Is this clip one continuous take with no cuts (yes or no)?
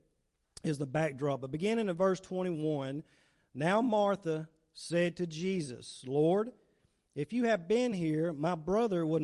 yes